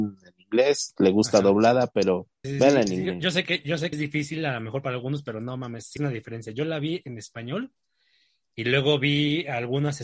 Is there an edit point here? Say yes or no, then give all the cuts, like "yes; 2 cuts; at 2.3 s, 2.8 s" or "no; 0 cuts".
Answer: yes; 3 cuts; at 2.4 s, 3.9 s, 6.0 s